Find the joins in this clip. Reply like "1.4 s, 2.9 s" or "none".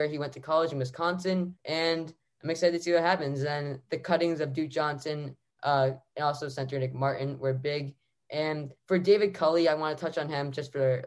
1.6 s, 8.8 s